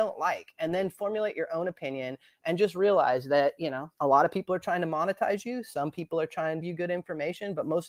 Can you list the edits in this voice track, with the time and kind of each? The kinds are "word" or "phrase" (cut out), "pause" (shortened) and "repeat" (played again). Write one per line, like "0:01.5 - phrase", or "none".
0:03.9 - pause
0:06.6 - phrase